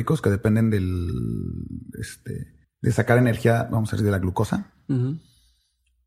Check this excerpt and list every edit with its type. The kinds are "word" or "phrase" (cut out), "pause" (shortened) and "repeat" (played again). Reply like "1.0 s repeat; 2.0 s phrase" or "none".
2.6 s pause